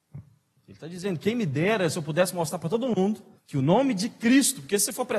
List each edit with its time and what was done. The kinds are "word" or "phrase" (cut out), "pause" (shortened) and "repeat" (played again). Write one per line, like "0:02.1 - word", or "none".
0:03.4 - pause